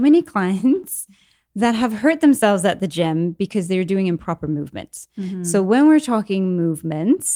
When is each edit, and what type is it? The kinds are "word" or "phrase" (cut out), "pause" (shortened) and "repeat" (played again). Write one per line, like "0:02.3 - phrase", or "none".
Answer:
none